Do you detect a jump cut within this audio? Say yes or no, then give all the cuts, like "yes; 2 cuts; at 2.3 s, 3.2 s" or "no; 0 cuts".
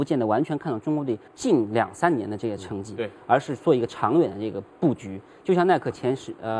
yes; 1 cut; at 1.3 s